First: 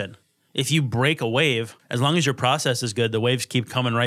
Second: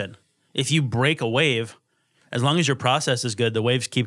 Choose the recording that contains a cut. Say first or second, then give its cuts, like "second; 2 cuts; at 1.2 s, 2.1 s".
first; 1 cut; at 1.8 s